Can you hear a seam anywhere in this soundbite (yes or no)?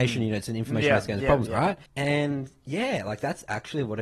yes